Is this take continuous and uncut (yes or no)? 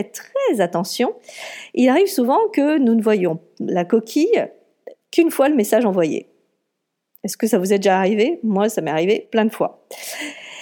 yes